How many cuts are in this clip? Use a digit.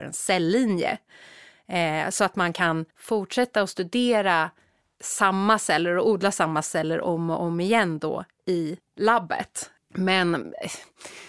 2